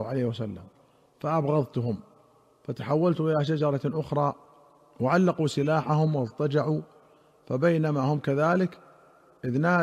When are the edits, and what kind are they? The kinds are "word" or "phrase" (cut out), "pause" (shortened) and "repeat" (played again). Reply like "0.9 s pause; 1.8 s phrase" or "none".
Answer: none